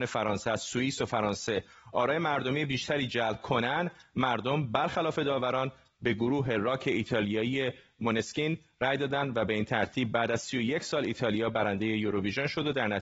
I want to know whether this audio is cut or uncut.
uncut